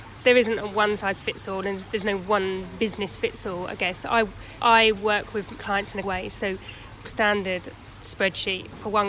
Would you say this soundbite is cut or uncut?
cut